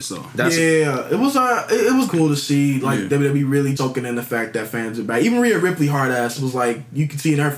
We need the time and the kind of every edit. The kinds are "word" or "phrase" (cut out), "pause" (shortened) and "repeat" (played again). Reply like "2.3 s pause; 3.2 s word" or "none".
2.1 s word; 3.8 s word